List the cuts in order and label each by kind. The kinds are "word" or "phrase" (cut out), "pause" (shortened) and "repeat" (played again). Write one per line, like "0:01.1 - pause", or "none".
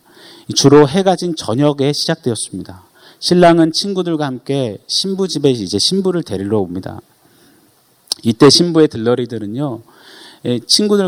none